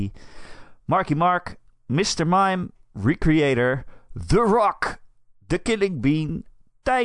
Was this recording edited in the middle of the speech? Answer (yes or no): no